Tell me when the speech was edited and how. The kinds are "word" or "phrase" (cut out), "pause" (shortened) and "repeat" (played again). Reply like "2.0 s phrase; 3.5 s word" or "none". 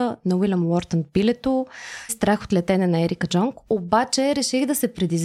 2.1 s word